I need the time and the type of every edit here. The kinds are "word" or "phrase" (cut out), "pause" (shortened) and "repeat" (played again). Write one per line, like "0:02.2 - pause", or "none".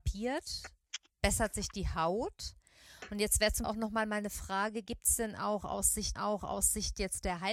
0:03.6 - phrase
0:06.2 - repeat